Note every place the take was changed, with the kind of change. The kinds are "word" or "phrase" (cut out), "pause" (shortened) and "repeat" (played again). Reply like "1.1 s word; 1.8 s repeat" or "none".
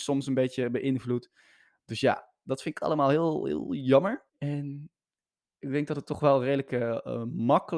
4.3 s pause